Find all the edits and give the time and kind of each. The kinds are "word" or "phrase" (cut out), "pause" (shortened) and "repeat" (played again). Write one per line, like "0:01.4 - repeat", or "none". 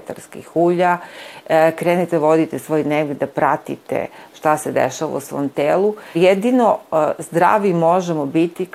0:06.1 - word